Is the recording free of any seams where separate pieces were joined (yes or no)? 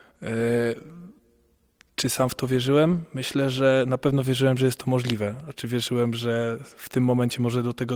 yes